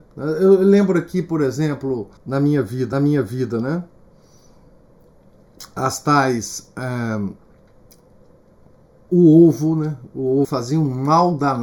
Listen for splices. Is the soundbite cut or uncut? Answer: cut